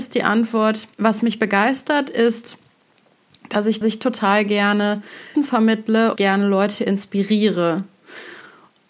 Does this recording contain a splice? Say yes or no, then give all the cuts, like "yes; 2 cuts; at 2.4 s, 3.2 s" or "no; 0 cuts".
yes; 4 cuts; at 0.9 s, 3.8 s, 5.3 s, 6.2 s